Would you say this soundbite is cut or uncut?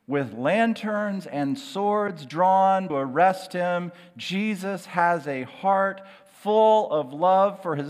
cut